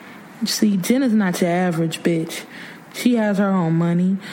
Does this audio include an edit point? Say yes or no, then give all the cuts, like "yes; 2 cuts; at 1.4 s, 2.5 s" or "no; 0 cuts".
no; 0 cuts